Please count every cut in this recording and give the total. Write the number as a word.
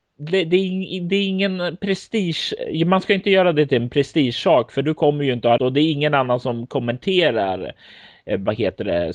one